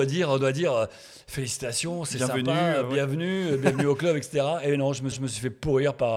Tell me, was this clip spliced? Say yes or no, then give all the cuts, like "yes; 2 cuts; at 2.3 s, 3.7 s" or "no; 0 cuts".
yes; 1 cut; at 5.1 s